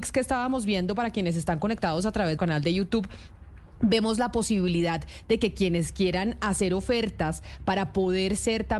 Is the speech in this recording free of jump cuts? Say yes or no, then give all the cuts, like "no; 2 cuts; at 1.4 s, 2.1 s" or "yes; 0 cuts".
no; 1 cut; at 2.4 s